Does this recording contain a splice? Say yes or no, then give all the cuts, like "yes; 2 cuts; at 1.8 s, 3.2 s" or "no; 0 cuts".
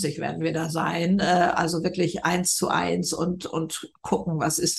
no; 0 cuts